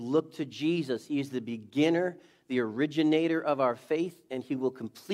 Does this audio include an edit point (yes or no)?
no